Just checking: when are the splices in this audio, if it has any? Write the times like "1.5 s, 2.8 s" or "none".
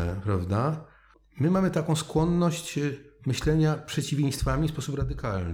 none